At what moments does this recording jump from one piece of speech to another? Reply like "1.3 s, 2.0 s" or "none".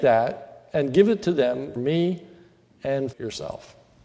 1.8 s, 3.1 s